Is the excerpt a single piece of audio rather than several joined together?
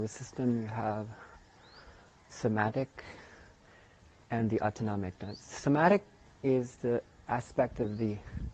yes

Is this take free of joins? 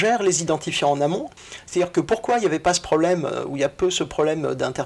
yes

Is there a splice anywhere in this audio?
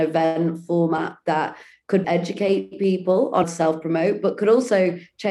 yes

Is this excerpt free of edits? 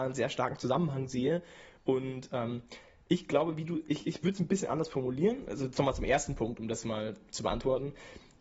yes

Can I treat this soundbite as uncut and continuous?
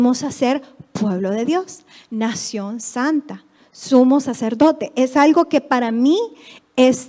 yes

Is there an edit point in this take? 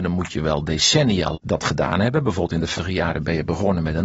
yes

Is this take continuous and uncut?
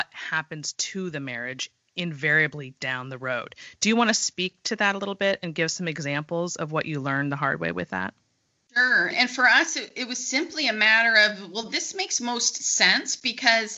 no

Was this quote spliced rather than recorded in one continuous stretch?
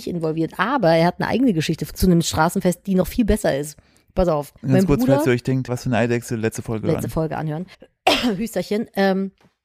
yes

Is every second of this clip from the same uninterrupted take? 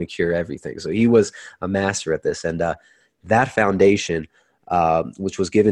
yes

